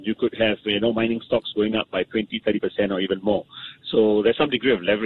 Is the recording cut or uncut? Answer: uncut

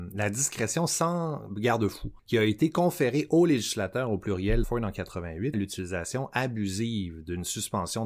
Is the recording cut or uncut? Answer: cut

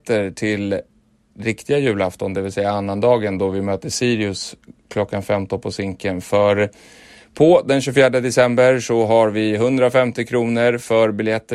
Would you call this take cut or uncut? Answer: uncut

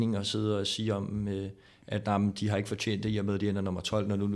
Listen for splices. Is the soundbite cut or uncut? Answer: uncut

